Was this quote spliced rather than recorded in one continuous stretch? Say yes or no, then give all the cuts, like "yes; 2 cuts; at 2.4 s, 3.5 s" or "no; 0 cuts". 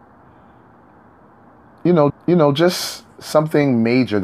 yes; 1 cut; at 2.1 s